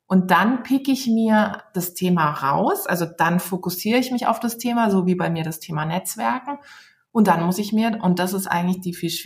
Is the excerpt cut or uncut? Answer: uncut